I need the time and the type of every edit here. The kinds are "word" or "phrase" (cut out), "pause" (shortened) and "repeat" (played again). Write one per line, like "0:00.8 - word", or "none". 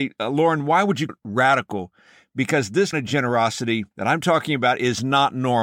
0:01.1 - word
0:02.9 - word
0:03.9 - pause